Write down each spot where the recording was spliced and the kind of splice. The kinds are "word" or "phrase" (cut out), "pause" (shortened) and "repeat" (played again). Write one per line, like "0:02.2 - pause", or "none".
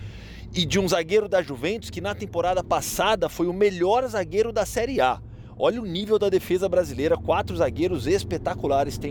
none

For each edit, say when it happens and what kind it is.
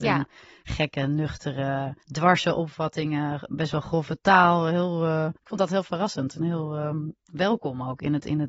0:02.0 - pause
0:05.4 - pause

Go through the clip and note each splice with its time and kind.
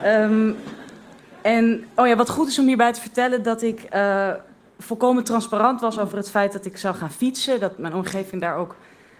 none

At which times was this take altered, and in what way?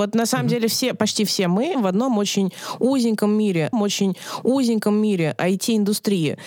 0:01.7 - word
0:03.7 - repeat

